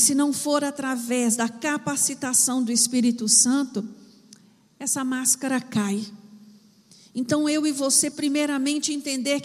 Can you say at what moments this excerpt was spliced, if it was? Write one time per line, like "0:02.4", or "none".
0:08.1